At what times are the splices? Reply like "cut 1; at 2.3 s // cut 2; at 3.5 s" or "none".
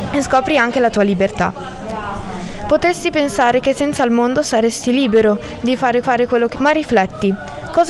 cut 1; at 6.0 s // cut 2; at 6.5 s